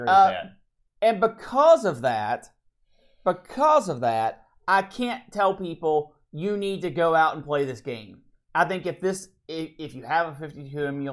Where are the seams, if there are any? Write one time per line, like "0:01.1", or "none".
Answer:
none